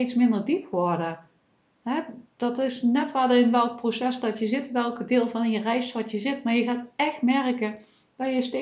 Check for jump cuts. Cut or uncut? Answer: uncut